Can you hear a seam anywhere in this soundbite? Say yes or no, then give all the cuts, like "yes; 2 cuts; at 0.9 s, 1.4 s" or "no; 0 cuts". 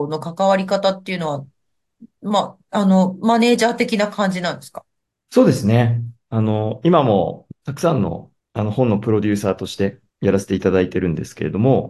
yes; 3 cuts; at 5.0 s, 8.4 s, 10.1 s